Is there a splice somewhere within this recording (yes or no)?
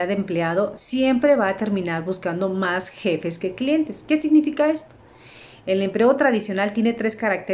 no